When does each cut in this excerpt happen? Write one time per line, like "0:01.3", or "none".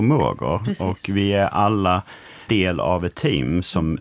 0:02.5